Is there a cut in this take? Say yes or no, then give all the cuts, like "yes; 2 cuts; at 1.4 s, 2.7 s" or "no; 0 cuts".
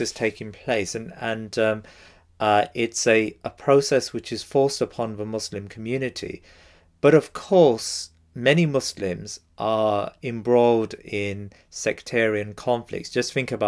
no; 0 cuts